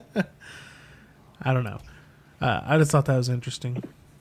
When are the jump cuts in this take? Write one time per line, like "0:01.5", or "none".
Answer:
none